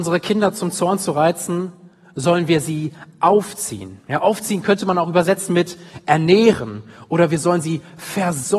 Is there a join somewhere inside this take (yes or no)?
no